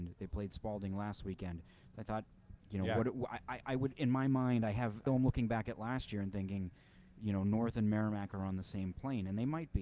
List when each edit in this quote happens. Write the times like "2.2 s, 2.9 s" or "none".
2.6 s, 5.1 s